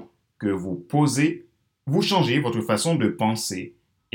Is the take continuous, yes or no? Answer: yes